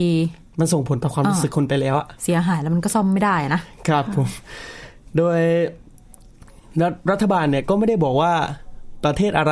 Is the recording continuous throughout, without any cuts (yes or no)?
yes